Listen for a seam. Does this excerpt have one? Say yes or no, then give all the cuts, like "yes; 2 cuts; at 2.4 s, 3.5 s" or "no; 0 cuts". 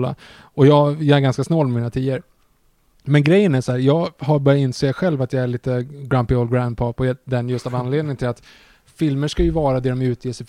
no; 0 cuts